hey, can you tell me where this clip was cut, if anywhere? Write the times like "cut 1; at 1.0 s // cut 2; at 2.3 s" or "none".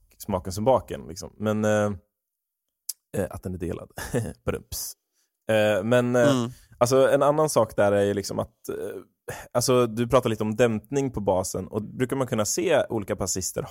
cut 1; at 11.8 s